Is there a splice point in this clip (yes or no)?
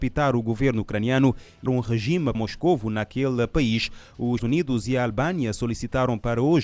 yes